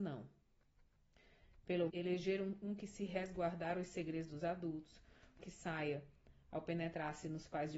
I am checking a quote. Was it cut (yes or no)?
yes